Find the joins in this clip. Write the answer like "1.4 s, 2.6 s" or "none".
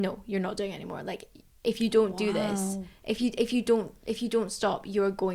none